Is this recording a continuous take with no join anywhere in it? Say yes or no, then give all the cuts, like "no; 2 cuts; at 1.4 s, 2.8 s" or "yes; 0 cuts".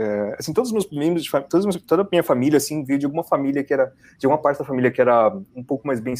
yes; 0 cuts